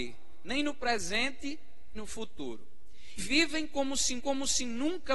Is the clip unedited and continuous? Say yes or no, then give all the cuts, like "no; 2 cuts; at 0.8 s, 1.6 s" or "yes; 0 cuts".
no; 3 cuts; at 1.9 s, 3.2 s, 4.2 s